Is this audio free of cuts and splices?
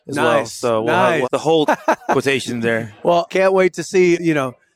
no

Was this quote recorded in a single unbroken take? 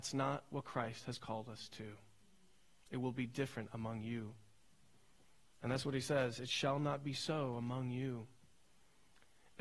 yes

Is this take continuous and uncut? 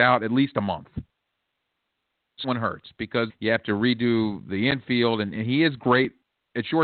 no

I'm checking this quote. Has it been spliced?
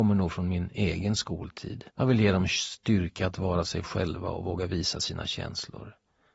yes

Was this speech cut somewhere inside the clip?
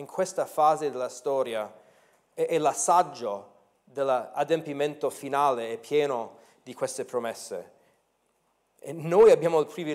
no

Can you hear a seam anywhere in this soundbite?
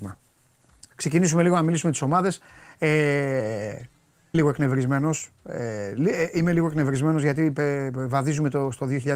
yes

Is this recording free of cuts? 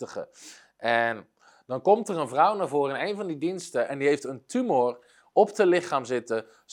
yes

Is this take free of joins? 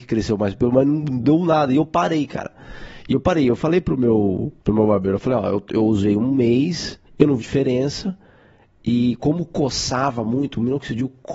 no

